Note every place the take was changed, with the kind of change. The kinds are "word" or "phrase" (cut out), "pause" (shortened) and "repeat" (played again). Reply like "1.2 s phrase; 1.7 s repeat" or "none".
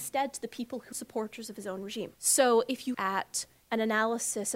0.9 s phrase; 2.1 s pause; 2.9 s word